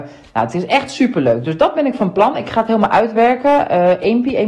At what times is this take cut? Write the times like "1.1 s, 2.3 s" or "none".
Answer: none

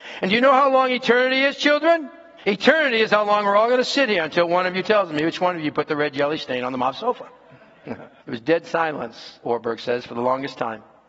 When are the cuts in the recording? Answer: 2.4 s, 8.2 s

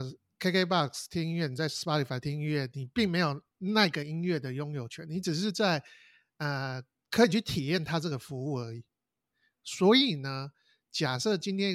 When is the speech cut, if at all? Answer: none

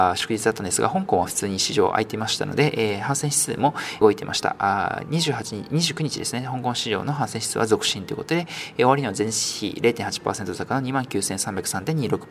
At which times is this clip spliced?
4.0 s

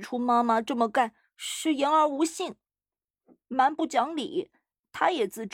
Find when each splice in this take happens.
none

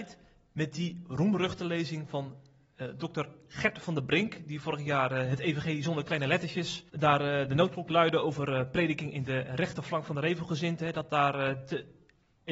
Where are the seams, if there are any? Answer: 6.9 s

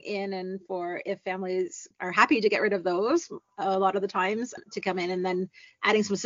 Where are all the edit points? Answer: none

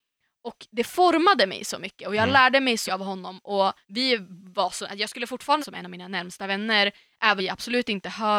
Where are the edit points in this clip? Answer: 2.9 s, 3.8 s, 5.6 s, 7.4 s

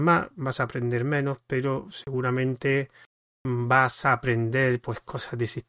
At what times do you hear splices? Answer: none

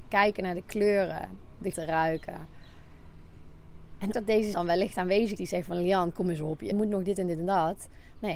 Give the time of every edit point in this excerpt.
1.7 s, 4.1 s, 4.5 s, 5.4 s, 6.7 s

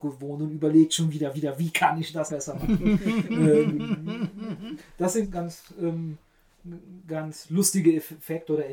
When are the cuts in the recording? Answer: 1.3 s, 2.3 s, 5.2 s

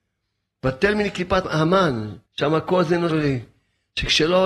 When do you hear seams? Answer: 2.3 s, 3.1 s

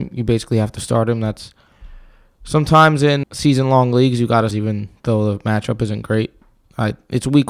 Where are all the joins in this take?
3.2 s, 4.5 s

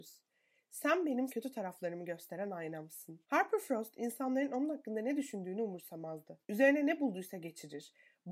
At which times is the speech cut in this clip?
1.3 s, 3.2 s, 6.4 s

